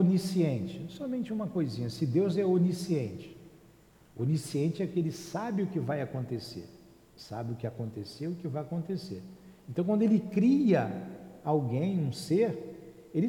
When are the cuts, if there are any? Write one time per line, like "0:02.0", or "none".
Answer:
none